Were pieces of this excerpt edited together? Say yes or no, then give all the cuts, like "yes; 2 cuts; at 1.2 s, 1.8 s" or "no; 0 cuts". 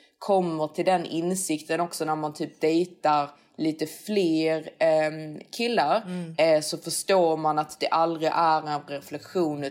no; 0 cuts